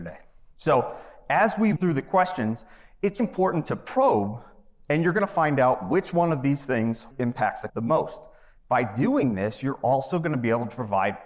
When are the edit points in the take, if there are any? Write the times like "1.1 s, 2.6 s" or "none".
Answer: 1.8 s, 3.2 s, 7.1 s, 7.7 s